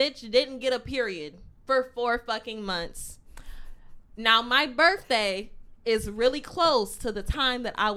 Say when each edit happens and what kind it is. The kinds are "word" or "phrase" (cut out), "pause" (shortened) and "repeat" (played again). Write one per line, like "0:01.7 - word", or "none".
0:01.6 - pause